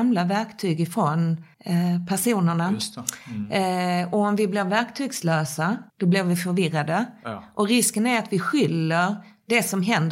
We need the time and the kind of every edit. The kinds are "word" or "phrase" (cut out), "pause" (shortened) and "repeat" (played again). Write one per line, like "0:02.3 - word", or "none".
0:01.5 - pause
0:05.9 - pause